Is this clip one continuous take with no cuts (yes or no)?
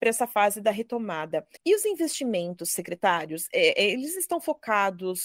no